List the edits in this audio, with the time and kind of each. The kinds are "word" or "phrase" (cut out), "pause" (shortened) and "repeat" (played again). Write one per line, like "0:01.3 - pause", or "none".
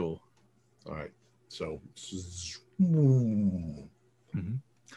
none